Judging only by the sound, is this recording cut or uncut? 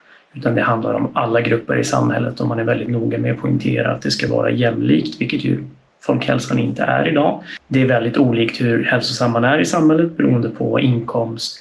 uncut